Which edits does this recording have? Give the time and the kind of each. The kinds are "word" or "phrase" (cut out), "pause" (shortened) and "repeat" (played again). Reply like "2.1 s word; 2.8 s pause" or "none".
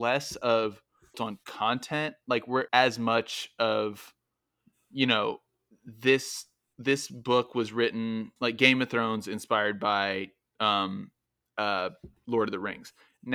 1.1 s phrase; 2.7 s phrase; 5.7 s word; 8.4 s word